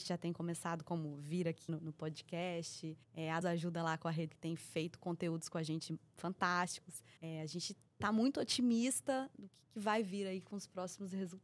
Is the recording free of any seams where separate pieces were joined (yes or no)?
no